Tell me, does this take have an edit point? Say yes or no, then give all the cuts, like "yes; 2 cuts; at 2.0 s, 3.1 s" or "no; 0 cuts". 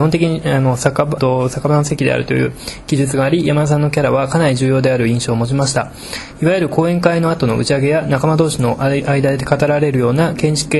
yes; 1 cut; at 1.2 s